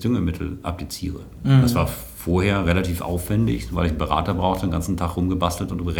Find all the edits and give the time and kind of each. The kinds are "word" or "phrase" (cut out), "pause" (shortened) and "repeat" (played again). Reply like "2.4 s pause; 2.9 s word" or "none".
none